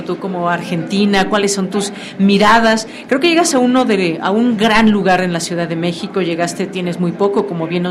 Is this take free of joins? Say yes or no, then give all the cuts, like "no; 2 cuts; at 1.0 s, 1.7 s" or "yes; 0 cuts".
yes; 0 cuts